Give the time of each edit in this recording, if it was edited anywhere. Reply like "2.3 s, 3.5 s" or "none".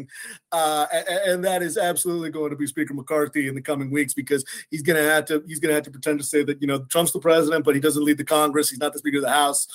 none